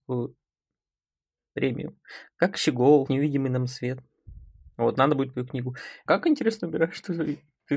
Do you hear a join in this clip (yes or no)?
yes